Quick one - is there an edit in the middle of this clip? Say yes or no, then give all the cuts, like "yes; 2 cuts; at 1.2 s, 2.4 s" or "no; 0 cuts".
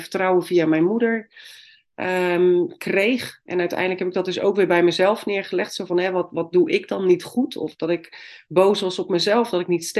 no; 0 cuts